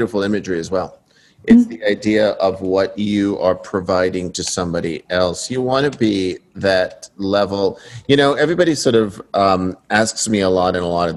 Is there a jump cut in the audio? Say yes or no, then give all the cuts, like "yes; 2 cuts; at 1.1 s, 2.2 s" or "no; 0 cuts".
no; 0 cuts